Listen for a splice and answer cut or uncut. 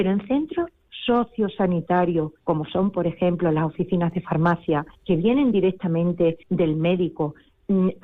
cut